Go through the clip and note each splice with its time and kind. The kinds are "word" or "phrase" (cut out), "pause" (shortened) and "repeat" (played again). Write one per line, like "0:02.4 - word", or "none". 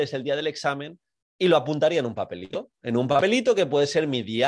0:01.1 - pause